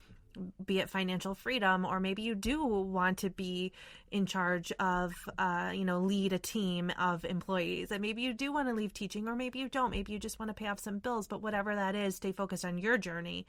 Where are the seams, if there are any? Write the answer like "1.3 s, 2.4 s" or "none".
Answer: none